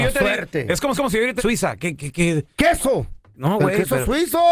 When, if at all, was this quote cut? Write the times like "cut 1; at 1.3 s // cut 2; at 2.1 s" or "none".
cut 1; at 0.9 s // cut 2; at 1.4 s // cut 3; at 2.0 s